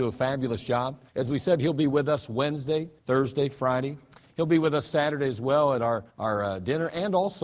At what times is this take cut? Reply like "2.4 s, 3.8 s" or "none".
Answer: 1.1 s, 3.0 s, 6.1 s